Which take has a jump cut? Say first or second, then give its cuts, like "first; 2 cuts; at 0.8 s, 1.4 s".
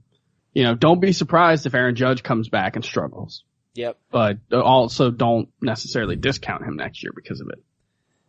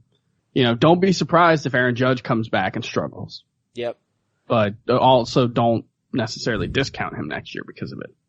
first; 2 cuts; at 4.0 s, 5.5 s